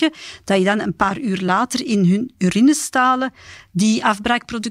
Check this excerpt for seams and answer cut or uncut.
uncut